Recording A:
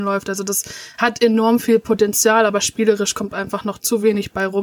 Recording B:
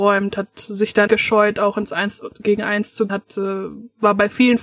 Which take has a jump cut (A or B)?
B